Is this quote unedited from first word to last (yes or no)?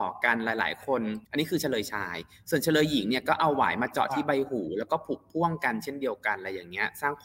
no